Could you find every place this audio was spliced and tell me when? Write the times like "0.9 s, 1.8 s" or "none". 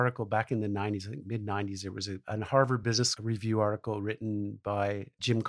none